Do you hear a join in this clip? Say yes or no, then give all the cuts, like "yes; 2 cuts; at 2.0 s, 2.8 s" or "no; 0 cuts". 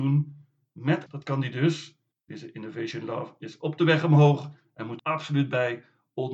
yes; 3 cuts; at 1.1 s, 2.1 s, 5.0 s